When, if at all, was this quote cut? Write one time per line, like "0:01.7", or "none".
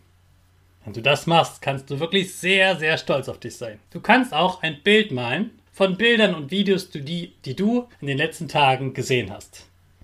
0:03.9
0:05.7
0:07.9